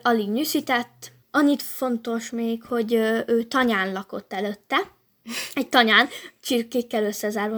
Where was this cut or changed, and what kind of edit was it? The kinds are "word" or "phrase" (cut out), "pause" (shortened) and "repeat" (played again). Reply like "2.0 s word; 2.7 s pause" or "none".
1.2 s pause